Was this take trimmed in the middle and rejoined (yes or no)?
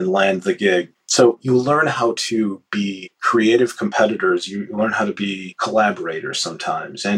no